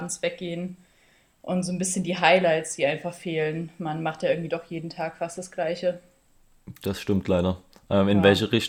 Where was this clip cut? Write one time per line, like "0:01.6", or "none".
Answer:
none